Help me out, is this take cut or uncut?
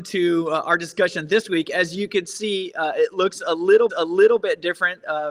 cut